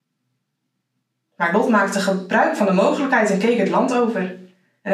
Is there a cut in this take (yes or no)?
no